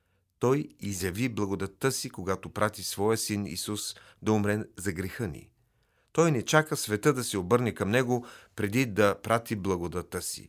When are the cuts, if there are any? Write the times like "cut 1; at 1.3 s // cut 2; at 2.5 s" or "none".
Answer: none